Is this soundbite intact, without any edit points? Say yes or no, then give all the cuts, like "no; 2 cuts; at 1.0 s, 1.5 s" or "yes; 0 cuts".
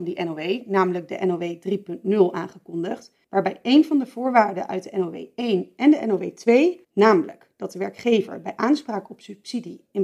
no; 2 cuts; at 3.2 s, 6.8 s